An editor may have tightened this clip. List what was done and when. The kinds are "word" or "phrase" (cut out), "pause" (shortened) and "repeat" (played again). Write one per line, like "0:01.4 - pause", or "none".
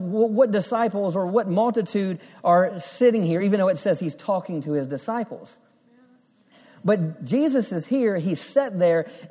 none